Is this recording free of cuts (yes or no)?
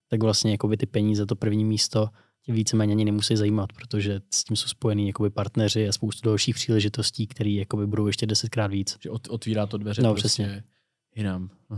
yes